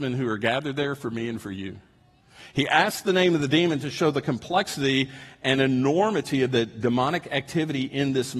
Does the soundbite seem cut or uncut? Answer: uncut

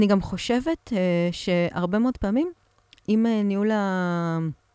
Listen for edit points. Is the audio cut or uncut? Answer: uncut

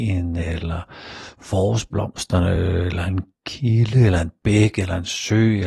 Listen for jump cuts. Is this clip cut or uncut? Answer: uncut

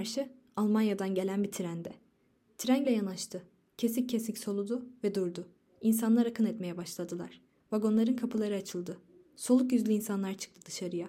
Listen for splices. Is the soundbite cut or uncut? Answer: cut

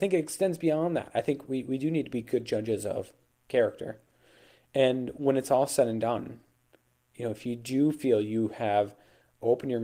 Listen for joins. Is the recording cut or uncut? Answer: uncut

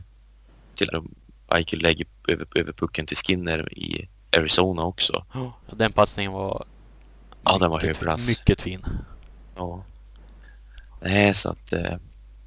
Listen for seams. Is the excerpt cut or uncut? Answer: cut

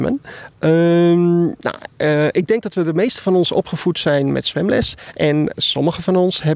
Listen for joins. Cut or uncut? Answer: uncut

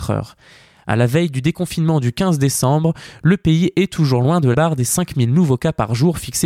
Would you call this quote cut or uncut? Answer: cut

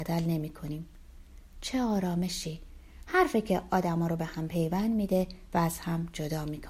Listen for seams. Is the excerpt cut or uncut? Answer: uncut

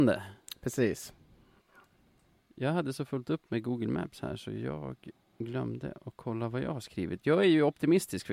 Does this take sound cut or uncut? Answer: uncut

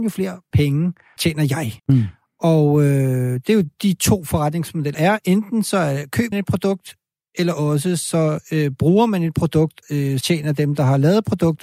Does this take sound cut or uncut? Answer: cut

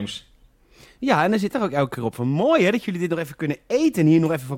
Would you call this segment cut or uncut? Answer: cut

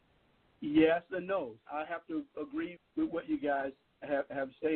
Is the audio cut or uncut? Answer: cut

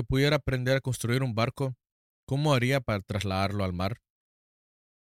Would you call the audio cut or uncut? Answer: uncut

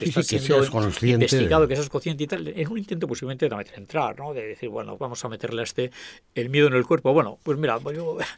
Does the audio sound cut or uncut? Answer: cut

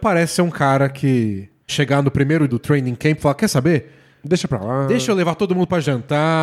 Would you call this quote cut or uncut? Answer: cut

